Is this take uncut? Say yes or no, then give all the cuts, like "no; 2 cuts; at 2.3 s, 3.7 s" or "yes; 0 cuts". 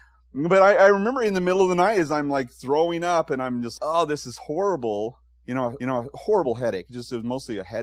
no; 2 cuts; at 3.8 s, 5.8 s